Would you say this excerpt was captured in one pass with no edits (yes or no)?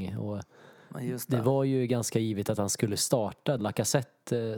no